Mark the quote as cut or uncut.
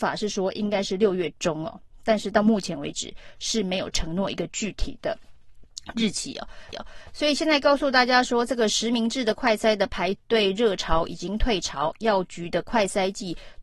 cut